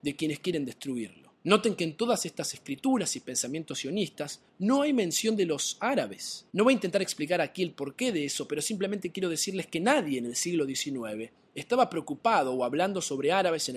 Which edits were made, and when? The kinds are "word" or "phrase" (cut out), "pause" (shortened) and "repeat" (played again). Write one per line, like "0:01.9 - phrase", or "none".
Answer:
0:01.3 - pause
0:04.5 - pause
0:06.5 - pause